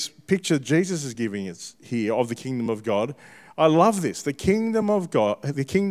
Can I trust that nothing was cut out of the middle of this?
yes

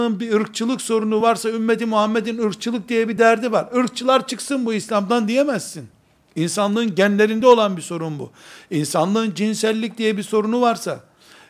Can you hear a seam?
no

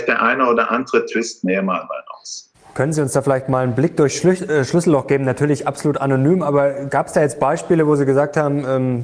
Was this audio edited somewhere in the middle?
no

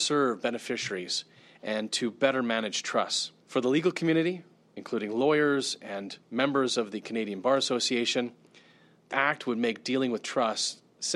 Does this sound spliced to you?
yes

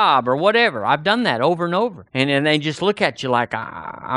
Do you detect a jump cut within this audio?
yes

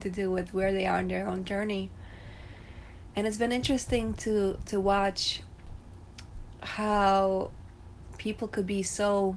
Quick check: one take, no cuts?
yes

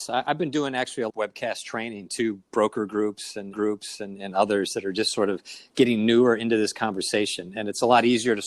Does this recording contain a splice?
yes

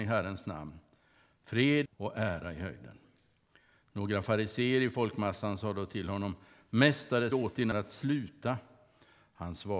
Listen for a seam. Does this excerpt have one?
yes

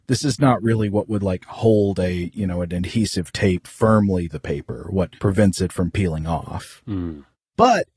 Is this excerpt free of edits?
no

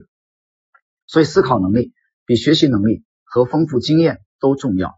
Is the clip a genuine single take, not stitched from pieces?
yes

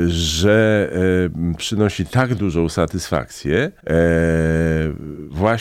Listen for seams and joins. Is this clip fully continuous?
no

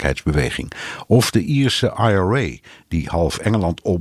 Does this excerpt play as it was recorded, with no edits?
yes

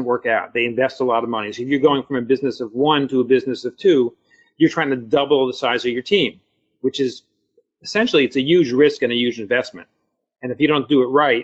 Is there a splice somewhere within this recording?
no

